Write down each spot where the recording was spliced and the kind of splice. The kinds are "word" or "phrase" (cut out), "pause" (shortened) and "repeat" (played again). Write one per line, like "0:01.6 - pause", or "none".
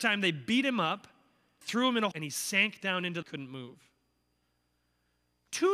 0:01.6 - word
0:02.1 - word
0:03.2 - phrase